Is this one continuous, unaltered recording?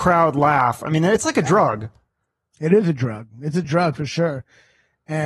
yes; 0 cuts

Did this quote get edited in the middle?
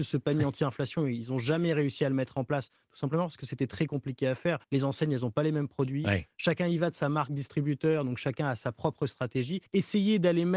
yes; 2 cuts; at 4.6 s, 9.7 s

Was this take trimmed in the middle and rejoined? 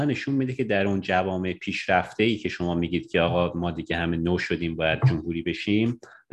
no; 0 cuts

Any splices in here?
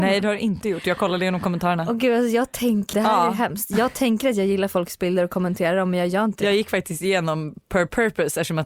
yes; 1 cut; at 2.9 s

